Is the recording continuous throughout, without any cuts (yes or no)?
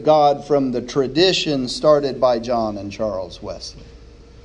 yes